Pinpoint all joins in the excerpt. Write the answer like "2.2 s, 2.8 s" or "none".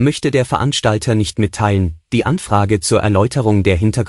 none